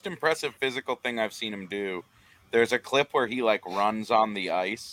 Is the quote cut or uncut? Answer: uncut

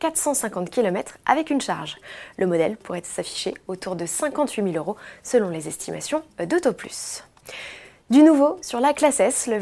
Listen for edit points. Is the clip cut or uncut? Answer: uncut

